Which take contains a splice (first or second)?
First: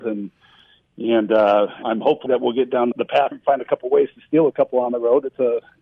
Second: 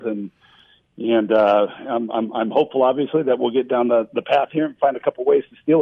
first